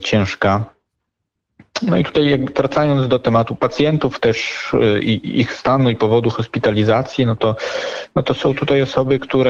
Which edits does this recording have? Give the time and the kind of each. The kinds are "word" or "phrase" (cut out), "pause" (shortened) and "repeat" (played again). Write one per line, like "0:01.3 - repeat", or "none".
none